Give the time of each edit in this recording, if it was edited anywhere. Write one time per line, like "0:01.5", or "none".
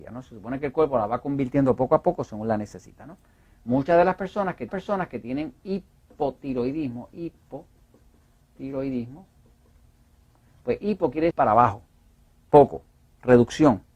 0:04.7
0:11.3